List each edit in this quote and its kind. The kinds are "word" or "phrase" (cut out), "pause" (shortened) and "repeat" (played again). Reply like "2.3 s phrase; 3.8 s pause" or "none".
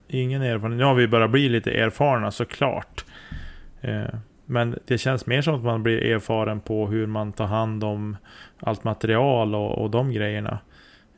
none